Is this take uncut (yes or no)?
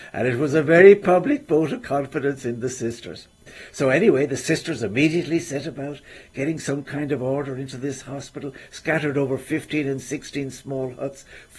yes